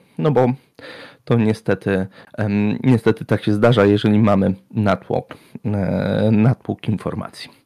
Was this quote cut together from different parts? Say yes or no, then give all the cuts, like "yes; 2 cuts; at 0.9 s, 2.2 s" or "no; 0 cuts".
no; 0 cuts